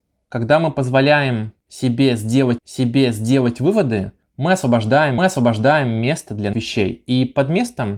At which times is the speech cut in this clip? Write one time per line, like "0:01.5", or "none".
0:02.6
0:05.2
0:06.5